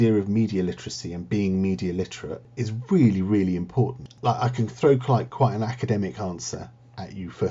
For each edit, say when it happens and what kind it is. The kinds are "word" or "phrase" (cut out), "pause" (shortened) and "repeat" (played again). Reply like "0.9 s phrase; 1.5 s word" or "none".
none